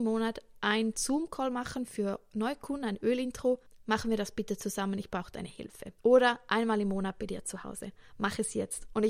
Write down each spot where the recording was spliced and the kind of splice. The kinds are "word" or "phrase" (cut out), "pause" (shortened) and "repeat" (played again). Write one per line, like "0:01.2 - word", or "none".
0:03.7 - pause
0:06.0 - pause